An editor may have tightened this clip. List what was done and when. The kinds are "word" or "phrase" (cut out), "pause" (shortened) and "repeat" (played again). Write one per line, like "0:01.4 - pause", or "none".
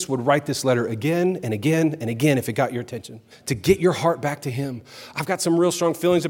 0:03.3 - pause